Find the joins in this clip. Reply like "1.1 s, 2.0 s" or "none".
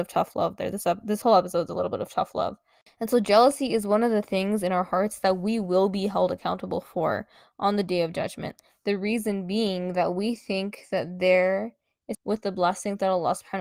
12.1 s